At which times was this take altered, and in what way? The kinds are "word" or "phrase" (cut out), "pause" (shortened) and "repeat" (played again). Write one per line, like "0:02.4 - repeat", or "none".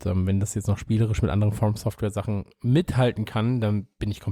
none